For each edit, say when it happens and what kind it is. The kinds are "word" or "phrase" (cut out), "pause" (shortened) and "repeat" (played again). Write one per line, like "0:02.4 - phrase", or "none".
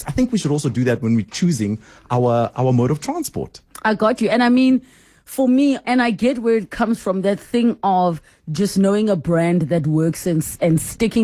0:05.8 - word